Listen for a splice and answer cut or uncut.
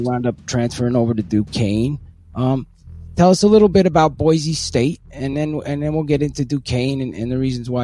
uncut